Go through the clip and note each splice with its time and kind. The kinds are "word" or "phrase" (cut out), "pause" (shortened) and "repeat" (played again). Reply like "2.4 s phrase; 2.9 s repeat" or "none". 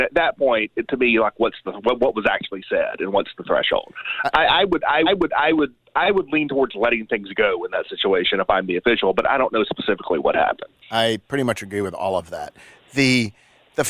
5.1 s repeat; 10.8 s pause

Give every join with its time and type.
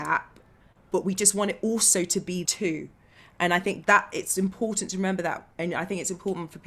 2.5 s phrase; 3.8 s word

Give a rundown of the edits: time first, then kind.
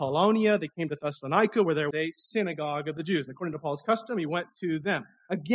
1.9 s word

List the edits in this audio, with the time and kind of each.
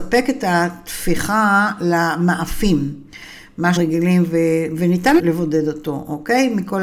3.8 s word; 5.2 s word

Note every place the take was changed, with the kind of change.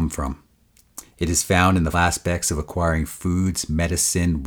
1.9 s word

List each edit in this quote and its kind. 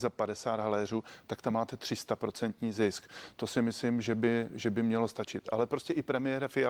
none

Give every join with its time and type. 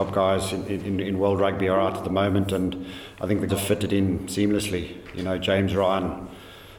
3.5 s word

